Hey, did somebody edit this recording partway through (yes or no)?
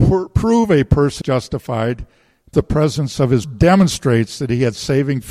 yes